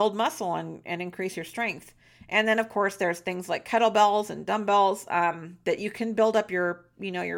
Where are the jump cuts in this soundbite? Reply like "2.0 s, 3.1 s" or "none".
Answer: none